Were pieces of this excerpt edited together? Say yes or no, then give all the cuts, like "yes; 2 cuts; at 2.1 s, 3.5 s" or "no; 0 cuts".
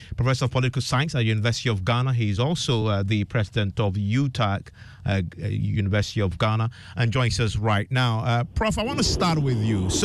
no; 0 cuts